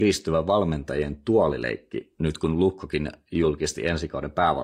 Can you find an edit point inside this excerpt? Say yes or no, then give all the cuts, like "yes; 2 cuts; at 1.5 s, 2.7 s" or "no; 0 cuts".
no; 0 cuts